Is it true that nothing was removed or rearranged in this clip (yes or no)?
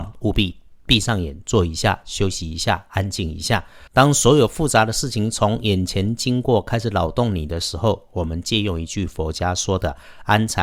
no